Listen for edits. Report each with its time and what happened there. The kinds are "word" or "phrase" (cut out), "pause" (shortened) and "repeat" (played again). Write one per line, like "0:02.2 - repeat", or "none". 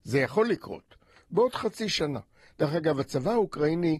none